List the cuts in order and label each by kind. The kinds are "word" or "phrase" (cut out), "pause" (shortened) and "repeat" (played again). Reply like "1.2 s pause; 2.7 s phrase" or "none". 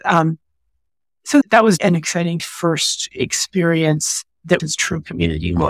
1.8 s word; 2.4 s phrase; 4.6 s phrase